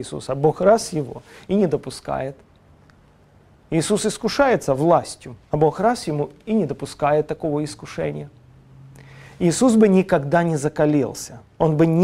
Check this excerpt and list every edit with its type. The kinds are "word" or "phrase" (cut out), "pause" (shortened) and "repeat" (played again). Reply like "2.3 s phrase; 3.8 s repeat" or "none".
none